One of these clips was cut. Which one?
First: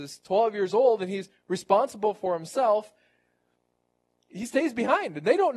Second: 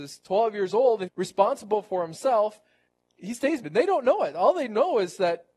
second; 3 cuts; at 1.1 s, 2.9 s, 3.6 s

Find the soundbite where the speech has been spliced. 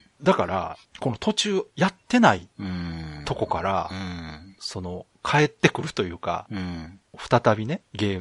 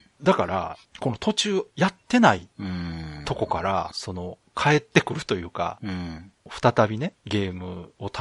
second; 1 cut; at 3.9 s

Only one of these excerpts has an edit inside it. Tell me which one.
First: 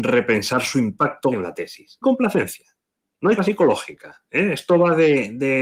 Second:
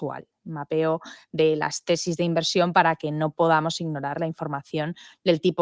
first; 3 cuts; at 1.3 s, 2.0 s, 3.4 s

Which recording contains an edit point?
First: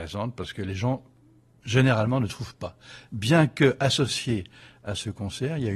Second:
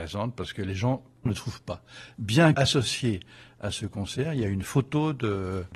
second; 2 cuts; at 1.3 s, 2.5 s

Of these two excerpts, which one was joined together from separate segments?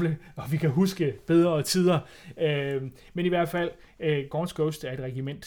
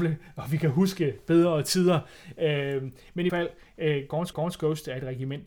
second; 2 cuts; at 3.3 s, 4.3 s

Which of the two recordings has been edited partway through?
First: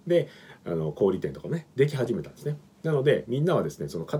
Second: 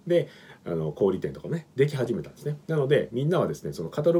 second; 1 cut; at 2.6 s

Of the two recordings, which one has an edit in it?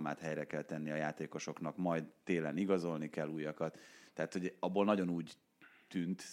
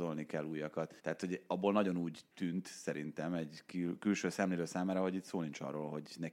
second; 2 cuts; at 1.0 s, 2.3 s

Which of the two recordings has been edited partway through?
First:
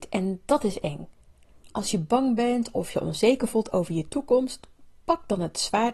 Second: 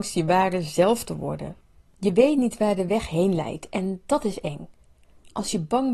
second; 1 cut; at 1.8 s

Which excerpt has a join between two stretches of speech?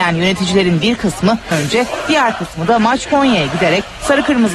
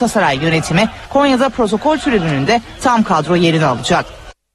first; 2 cuts; at 1.5 s, 3.1 s

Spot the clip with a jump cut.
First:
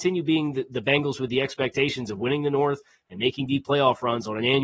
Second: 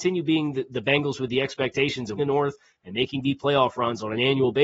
second; 1 cut; at 2.2 s

